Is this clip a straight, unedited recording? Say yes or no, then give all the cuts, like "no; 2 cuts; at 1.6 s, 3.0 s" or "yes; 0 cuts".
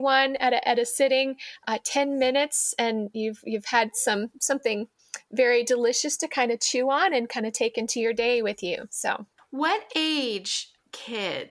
yes; 0 cuts